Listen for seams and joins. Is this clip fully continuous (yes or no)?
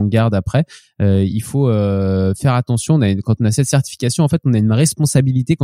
yes